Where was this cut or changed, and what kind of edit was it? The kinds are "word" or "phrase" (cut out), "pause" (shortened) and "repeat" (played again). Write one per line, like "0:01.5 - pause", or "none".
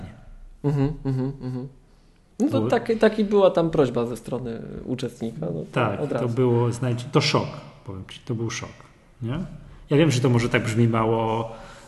0:02.5 - word
0:07.1 - word

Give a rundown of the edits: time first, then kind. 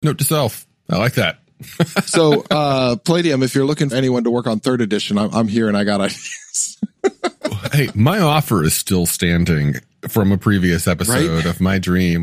0:03.9 - word

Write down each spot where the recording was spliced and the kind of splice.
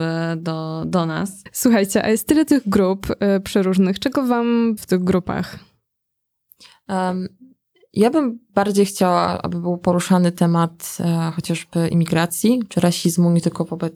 0:04.8 - word

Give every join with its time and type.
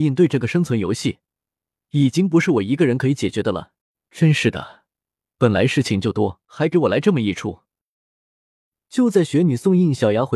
0:03.8 - pause
0:06.4 - pause

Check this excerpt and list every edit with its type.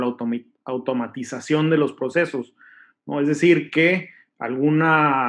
none

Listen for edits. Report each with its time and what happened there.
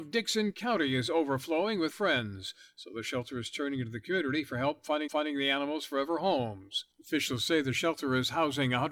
0:01.9 - word
0:05.1 - repeat
0:06.9 - pause

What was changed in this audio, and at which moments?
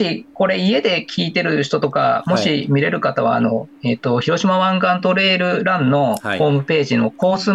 0:03.8 - pause

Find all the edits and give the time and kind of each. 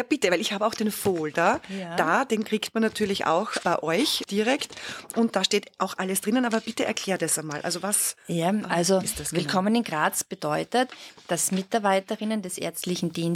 none

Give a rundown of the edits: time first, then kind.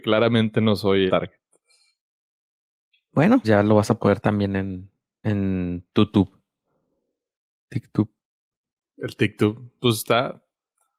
0:01.1 - word
0:03.4 - word
0:04.2 - word
0:05.2 - word

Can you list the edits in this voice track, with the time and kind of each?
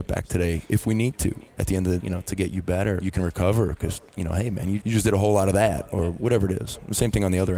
0:02.0 - word
0:03.0 - word
0:04.8 - word

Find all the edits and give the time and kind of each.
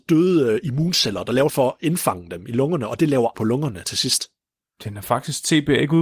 0:01.5 - phrase
0:03.3 - word
0:04.5 - pause

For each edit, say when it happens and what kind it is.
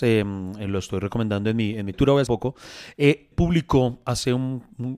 0:01.9 - phrase
0:02.3 - phrase
0:03.3 - phrase

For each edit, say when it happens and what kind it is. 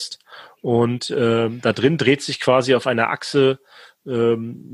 none

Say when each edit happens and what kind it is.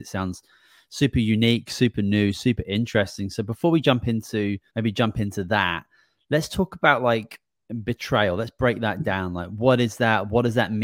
0:04.7 - pause

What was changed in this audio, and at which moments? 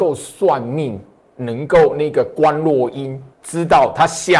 0:01.2 - pause
0:03.3 - pause

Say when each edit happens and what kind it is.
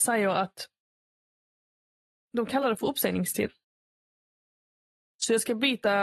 none

